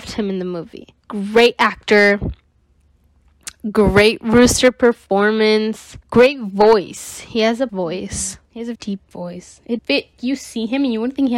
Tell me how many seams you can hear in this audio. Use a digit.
6